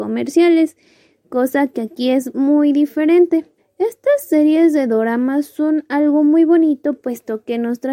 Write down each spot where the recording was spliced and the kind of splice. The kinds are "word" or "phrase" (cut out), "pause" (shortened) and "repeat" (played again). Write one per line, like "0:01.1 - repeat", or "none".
0:03.6 - pause